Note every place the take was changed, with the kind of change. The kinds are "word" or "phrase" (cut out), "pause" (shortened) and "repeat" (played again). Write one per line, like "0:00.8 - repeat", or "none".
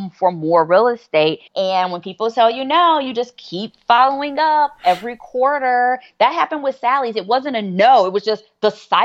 0:01.5 - pause